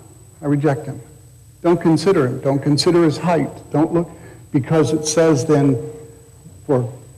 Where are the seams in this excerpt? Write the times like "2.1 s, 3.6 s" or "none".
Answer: none